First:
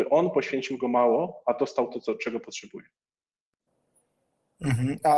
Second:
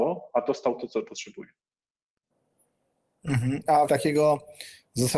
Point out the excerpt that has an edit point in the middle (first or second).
second